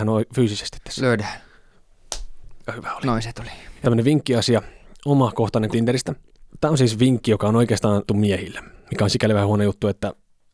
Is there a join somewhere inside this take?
yes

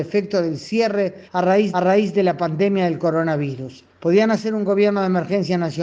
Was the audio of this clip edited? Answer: yes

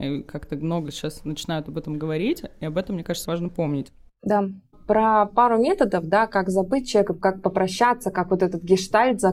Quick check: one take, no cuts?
no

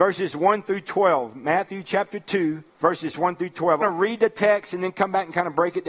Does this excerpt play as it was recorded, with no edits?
no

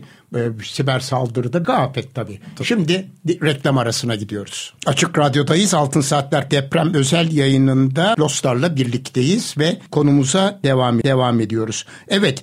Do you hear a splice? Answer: yes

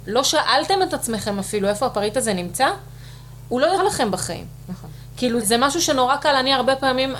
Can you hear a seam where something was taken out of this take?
yes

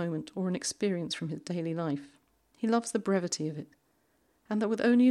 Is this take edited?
no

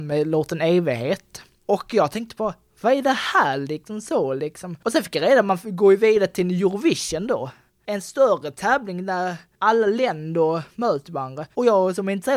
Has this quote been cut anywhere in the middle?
no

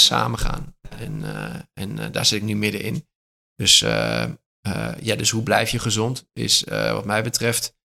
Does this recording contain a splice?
no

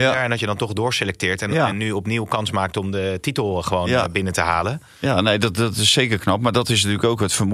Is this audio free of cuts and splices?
yes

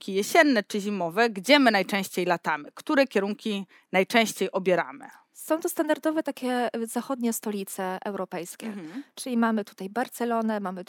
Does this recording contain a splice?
no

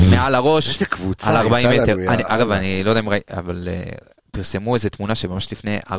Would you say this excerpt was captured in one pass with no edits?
yes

